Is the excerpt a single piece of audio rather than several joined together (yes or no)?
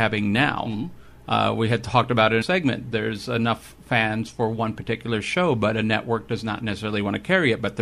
no